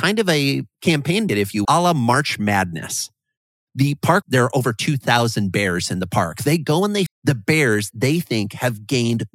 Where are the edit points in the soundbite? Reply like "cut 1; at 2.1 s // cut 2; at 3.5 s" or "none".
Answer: cut 1; at 1.3 s // cut 2; at 1.6 s // cut 3; at 4.2 s // cut 4; at 7.1 s // cut 5; at 7.9 s